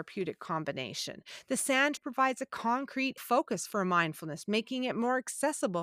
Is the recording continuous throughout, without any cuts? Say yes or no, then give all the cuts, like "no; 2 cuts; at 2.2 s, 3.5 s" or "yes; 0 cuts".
no; 3 cuts; at 2.0 s, 3.2 s, 4.5 s